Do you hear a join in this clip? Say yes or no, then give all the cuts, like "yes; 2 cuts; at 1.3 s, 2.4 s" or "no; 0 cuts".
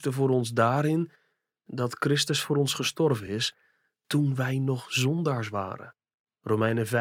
no; 0 cuts